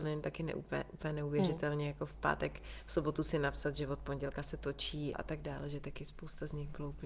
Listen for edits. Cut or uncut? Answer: cut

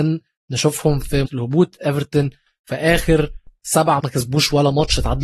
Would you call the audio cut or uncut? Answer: cut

